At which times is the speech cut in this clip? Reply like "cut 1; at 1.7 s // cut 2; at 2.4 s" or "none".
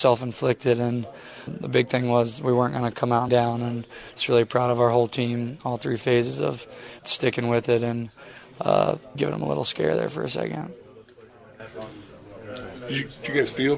cut 1; at 1.5 s // cut 2; at 3.3 s // cut 3; at 7.0 s // cut 4; at 9.1 s

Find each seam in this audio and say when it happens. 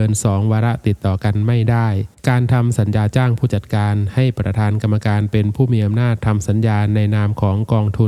cut 1; at 2.2 s

